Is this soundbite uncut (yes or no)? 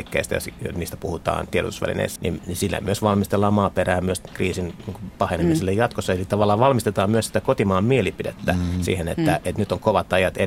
no